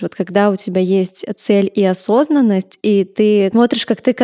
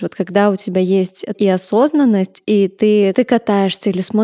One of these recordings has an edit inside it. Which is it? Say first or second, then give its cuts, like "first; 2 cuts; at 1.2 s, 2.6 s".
second; 2 cuts; at 1.3 s, 3.1 s